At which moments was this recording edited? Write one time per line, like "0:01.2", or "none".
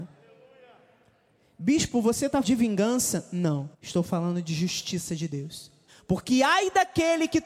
0:02.4
0:03.7
0:05.9